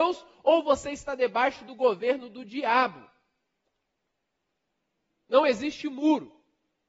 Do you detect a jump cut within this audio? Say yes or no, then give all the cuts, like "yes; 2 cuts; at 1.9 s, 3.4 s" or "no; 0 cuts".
no; 0 cuts